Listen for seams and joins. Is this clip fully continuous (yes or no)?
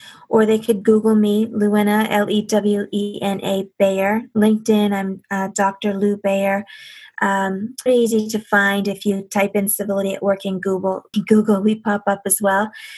no